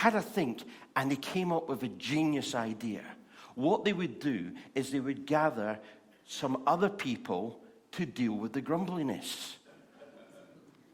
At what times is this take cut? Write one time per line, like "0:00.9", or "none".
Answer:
none